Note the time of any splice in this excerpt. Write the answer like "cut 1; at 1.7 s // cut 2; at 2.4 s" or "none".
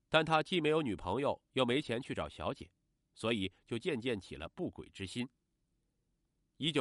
none

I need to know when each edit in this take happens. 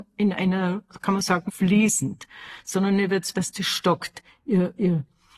cut 1; at 1.5 s // cut 2; at 3.3 s

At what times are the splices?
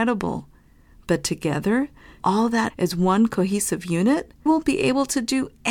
cut 1; at 2.2 s // cut 2; at 2.7 s // cut 3; at 4.5 s

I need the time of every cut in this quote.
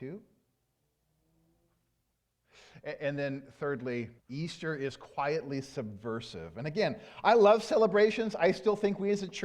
cut 1; at 4.2 s

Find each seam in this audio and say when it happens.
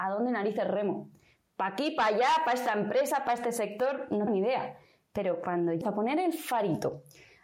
cut 1; at 4.3 s // cut 2; at 5.8 s

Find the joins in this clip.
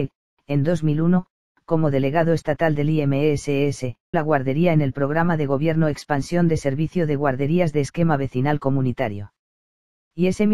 cut 1; at 4.1 s

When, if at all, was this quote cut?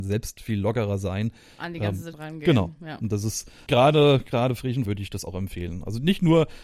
cut 1; at 2.1 s // cut 2; at 3.7 s // cut 3; at 4.9 s

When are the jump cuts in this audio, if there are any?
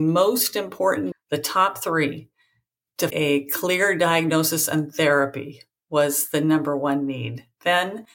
cut 1; at 1.1 s // cut 2; at 3.1 s

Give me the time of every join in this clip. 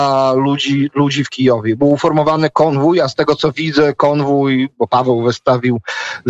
none

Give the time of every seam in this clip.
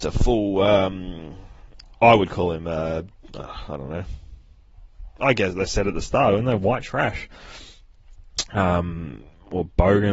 none

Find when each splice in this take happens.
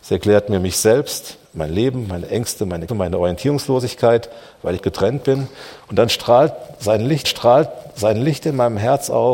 cut 1; at 1.4 s // cut 2; at 2.9 s // cut 3; at 4.8 s // cut 4; at 7.2 s

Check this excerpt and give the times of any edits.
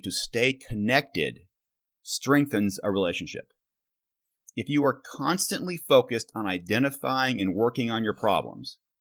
none

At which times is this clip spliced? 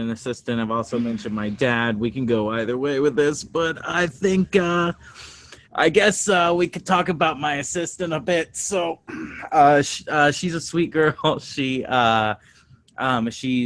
cut 1; at 5.6 s

